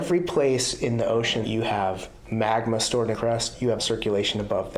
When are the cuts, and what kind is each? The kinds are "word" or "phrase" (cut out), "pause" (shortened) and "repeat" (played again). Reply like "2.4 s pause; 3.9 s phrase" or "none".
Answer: 1.4 s word; 3.1 s word; 3.8 s word